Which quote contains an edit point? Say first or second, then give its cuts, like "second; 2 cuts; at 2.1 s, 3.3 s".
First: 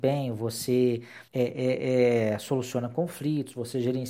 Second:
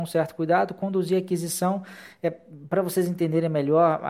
first; 1 cut; at 1.3 s